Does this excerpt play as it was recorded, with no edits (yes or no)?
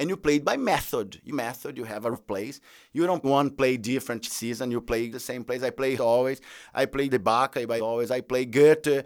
no